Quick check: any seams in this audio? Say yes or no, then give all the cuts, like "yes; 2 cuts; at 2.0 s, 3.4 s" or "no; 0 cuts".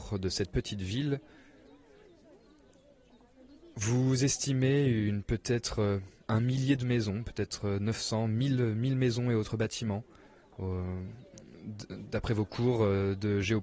yes; 1 cut; at 6.3 s